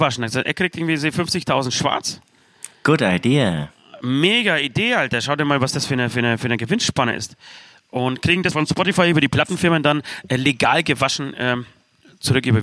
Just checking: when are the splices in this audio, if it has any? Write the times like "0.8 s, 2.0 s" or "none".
8.5 s